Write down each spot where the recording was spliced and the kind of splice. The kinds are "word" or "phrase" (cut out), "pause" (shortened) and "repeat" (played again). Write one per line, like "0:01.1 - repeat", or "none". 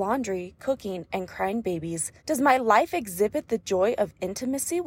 0:02.2 - pause